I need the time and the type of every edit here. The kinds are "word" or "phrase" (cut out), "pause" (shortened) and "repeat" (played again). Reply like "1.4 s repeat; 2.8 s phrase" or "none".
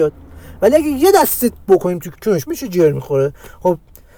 1.6 s word; 2.1 s word; 2.5 s word